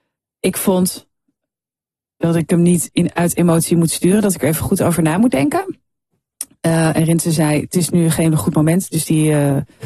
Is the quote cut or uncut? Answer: uncut